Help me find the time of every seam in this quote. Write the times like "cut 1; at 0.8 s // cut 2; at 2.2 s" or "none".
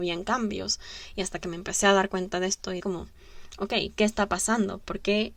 cut 1; at 2.8 s